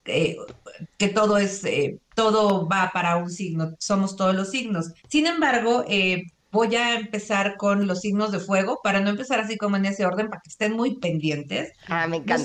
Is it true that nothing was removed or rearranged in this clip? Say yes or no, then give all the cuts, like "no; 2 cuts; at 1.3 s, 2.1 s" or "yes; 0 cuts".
no; 1 cut; at 5.0 s